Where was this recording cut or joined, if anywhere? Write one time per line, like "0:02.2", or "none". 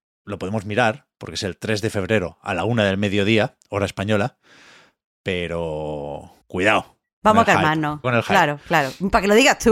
0:06.4
0:08.0